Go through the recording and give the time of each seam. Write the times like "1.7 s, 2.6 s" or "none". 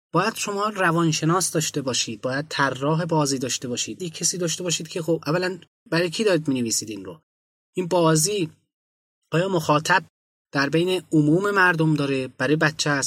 4.0 s

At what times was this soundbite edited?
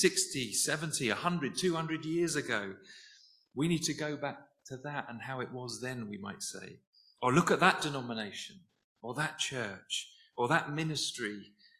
none

